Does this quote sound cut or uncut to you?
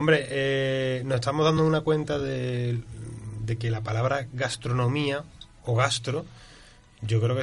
uncut